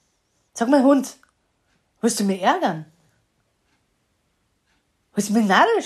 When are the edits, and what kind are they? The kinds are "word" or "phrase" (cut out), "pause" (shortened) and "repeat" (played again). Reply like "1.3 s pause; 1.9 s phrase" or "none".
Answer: none